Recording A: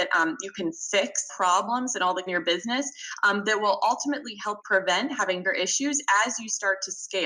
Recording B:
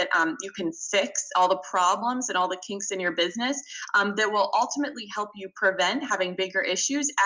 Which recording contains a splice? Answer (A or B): A